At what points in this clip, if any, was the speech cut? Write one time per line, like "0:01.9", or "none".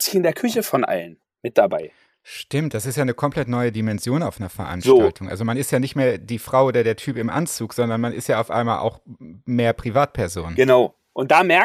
none

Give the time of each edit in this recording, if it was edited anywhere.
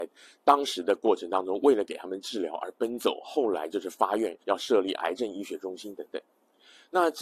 0:04.4

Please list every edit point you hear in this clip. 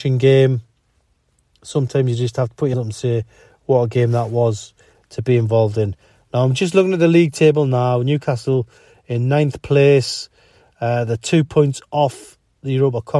0:02.7

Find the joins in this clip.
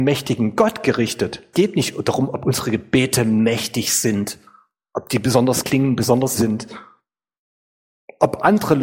0:01.5
0:05.6
0:06.3

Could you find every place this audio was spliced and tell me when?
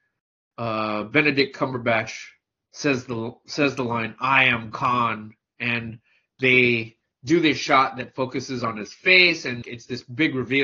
0:09.6

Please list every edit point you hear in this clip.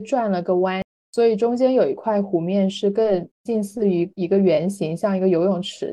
none

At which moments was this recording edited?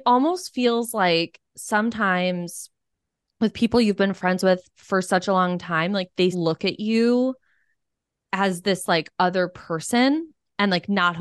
0:06.3

